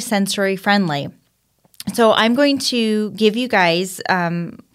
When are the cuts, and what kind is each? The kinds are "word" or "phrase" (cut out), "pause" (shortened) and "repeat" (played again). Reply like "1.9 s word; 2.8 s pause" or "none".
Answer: none